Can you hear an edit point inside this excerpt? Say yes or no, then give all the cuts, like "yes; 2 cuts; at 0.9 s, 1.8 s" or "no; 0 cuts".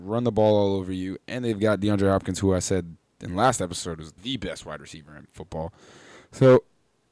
yes; 1 cut; at 4.2 s